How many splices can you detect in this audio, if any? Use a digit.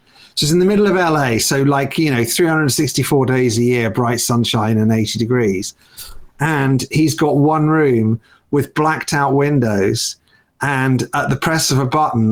0